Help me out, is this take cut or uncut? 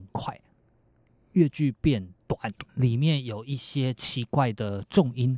cut